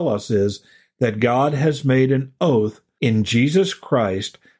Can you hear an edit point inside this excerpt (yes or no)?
no